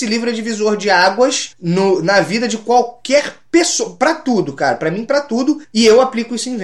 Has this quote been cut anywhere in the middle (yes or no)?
no